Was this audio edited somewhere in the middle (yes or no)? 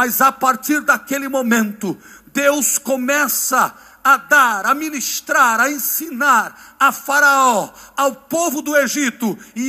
no